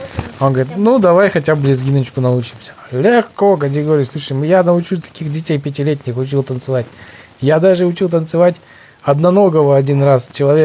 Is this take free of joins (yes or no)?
no